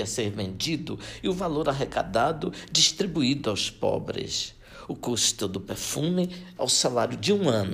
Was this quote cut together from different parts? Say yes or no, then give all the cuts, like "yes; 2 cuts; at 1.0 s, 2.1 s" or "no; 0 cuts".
yes; 1 cut; at 6.6 s